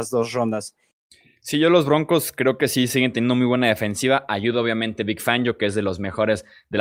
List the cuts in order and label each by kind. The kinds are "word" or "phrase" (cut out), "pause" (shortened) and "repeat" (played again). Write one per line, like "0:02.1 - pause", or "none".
none